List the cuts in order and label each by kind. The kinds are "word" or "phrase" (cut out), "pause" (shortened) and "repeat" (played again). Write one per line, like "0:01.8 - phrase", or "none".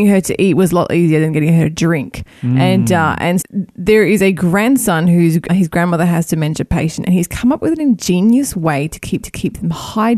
0:03.4 - word
0:05.5 - word
0:09.2 - repeat